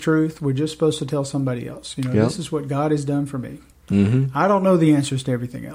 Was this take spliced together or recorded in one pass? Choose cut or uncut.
uncut